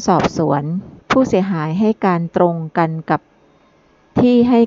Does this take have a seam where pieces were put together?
yes; 1 cut; at 1.0 s

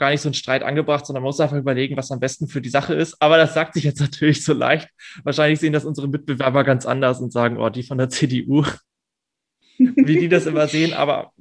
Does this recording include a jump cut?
no; 0 cuts

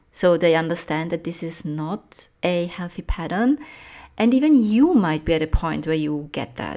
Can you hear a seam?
yes; 1 cut; at 2.3 s

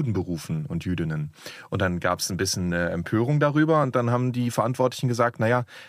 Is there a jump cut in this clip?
no; 0 cuts

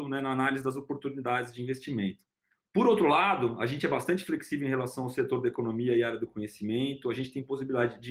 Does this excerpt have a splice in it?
no; 0 cuts

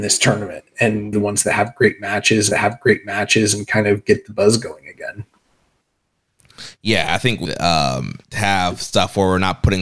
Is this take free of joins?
no; 4 cuts; at 1.1 s, 2.5 s, 7.4 s, 8.2 s

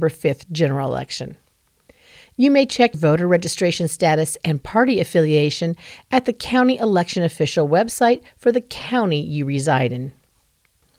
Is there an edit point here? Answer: yes; 1 cut; at 2.9 s

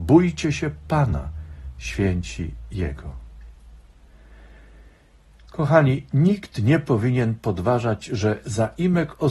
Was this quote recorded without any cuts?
yes; 0 cuts

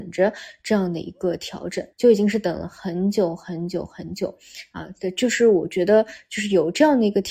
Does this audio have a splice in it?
yes; 1 cut; at 1.9 s

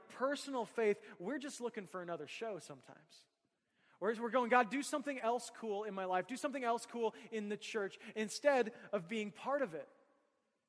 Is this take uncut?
yes; 0 cuts

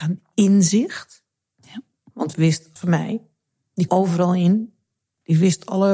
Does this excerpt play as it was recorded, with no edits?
no; 3 cuts; at 2.3 s, 2.8 s, 3.9 s

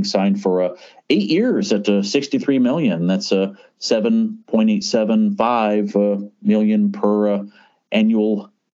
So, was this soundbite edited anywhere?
no; 0 cuts

